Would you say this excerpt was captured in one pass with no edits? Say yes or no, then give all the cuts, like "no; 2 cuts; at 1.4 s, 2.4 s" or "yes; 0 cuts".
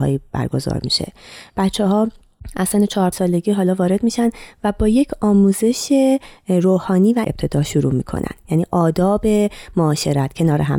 no; 2 cuts; at 3.1 s, 7.2 s